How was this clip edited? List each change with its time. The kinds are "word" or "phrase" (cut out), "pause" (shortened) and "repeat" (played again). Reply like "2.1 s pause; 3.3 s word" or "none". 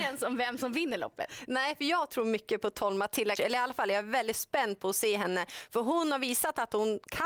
3.4 s word